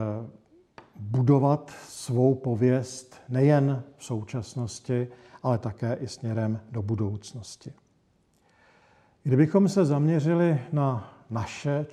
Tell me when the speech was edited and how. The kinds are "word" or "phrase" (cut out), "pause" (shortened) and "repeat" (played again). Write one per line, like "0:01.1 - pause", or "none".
none